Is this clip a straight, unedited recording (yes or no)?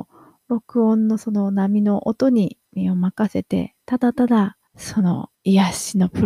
no